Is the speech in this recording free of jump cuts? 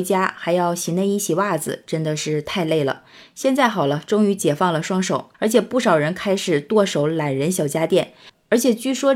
no; 1 cut; at 5.3 s

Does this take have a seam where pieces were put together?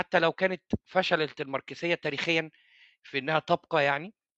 no; 0 cuts

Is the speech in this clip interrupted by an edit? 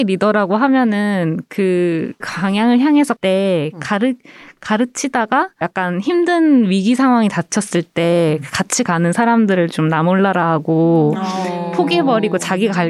yes; 3 cuts; at 2.2 s, 3.2 s, 5.6 s

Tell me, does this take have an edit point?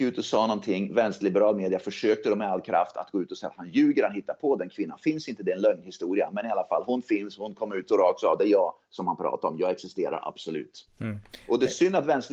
no; 0 cuts

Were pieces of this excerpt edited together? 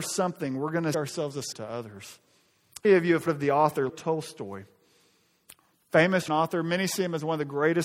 yes; 6 cuts; at 0.9 s, 1.5 s, 2.8 s, 3.3 s, 3.9 s, 6.3 s

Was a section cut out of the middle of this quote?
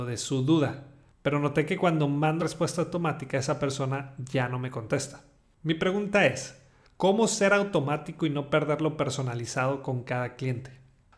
yes; 1 cut; at 2.4 s

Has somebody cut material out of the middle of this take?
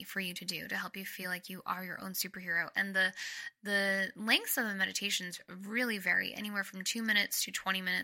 no; 0 cuts

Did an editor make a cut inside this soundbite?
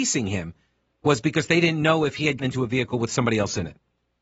yes; 1 cut; at 2.4 s

